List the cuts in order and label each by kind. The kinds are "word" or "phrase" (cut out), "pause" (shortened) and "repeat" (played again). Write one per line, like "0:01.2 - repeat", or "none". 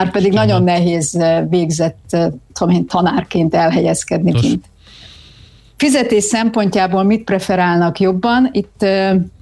0:02.5 - word
0:04.3 - word